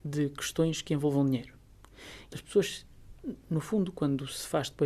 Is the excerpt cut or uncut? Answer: cut